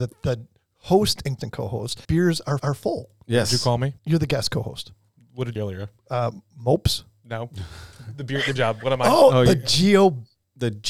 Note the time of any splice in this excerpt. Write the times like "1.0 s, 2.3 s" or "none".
1.4 s, 2.0 s, 2.6 s, 4.0 s, 5.6 s, 6.0 s, 8.6 s